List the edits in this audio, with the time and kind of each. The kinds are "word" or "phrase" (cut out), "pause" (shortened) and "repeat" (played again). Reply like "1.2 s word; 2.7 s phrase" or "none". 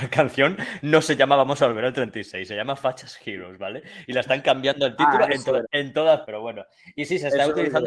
5.6 s word; 6.2 s word